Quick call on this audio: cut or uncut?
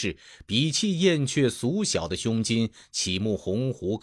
uncut